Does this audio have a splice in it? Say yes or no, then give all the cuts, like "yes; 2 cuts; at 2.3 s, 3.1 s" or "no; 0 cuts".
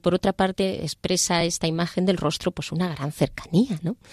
no; 0 cuts